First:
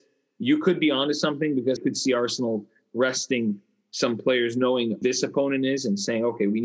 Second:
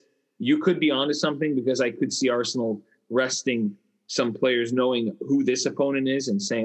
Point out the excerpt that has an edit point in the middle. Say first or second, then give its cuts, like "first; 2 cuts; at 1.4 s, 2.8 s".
first; 2 cuts; at 1.8 s, 5.0 s